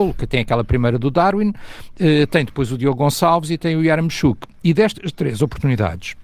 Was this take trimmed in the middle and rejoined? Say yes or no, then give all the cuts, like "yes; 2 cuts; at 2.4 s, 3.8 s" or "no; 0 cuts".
no; 0 cuts